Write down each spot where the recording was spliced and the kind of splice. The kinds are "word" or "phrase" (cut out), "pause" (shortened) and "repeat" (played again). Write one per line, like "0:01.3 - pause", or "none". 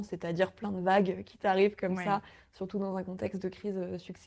none